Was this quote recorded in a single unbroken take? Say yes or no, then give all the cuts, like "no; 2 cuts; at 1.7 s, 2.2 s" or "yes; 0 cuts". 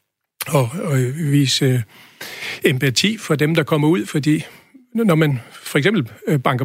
yes; 0 cuts